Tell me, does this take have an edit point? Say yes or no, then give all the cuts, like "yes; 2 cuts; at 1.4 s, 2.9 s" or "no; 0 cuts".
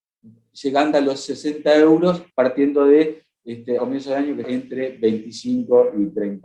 yes; 4 cuts; at 0.9 s, 2.3 s, 3.8 s, 4.4 s